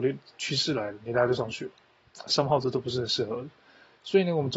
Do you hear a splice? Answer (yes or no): no